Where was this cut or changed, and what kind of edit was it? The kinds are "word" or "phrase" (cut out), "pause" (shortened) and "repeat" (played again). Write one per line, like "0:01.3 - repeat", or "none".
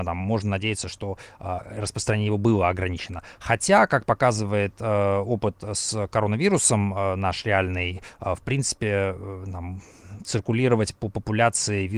none